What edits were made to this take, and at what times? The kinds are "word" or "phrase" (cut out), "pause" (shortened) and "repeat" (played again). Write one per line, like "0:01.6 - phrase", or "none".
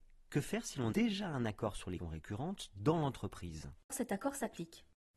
0:00.9 - word
0:02.0 - word
0:03.9 - word